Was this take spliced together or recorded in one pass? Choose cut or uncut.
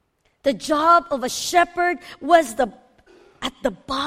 uncut